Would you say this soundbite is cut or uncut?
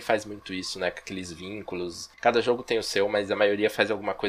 cut